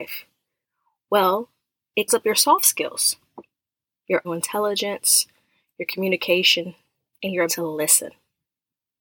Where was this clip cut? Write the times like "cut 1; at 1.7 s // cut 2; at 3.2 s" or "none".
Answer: cut 1; at 2.1 s // cut 2; at 4.2 s // cut 3; at 7.5 s